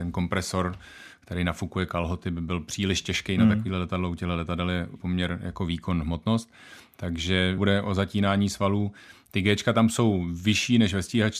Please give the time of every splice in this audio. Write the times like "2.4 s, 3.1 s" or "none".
5.0 s, 7.6 s